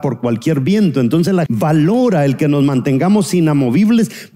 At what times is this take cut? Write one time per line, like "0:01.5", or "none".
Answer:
0:01.5